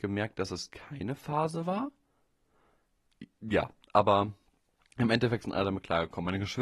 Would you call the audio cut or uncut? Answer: uncut